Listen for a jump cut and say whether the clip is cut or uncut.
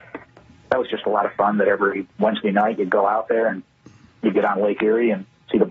uncut